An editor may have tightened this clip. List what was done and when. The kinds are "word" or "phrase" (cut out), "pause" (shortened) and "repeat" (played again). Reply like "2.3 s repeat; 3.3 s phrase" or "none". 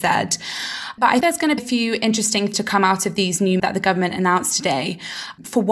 1.2 s word; 1.6 s word; 2.5 s word; 3.6 s word